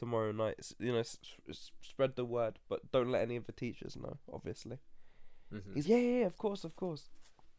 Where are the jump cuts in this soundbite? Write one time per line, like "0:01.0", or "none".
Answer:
0:05.8